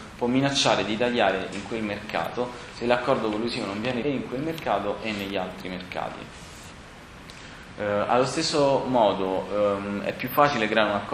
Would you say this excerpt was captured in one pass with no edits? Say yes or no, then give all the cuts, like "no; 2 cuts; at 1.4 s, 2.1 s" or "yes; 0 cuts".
no; 2 cuts; at 1.5 s, 4.0 s